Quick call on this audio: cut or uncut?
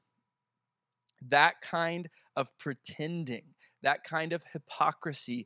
uncut